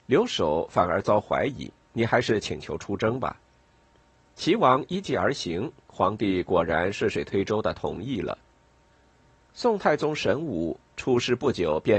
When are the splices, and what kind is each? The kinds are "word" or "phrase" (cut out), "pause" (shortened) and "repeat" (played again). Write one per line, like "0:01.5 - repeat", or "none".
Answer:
0:03.4 - pause
0:08.9 - pause